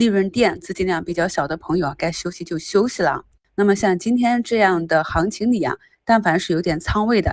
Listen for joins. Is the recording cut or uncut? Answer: uncut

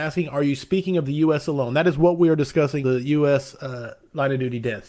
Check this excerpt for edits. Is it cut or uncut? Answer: cut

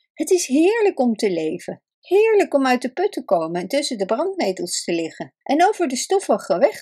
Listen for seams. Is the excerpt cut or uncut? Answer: cut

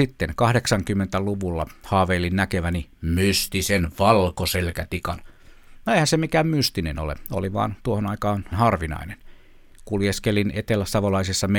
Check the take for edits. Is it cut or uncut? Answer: cut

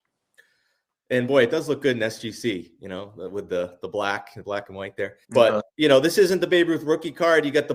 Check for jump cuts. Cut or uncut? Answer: cut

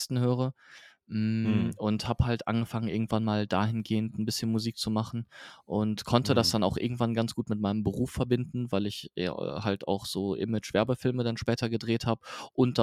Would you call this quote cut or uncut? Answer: uncut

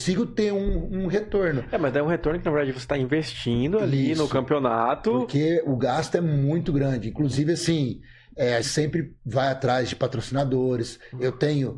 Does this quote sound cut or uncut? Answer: cut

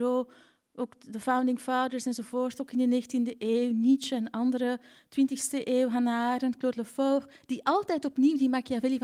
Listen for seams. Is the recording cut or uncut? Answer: uncut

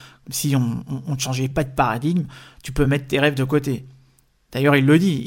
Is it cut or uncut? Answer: uncut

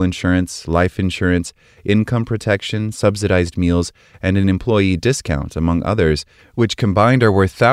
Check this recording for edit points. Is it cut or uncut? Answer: uncut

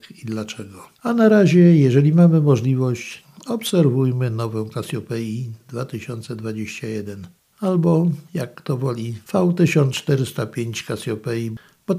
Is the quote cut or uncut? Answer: cut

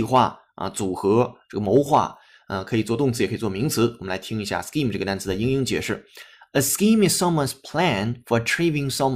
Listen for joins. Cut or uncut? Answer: uncut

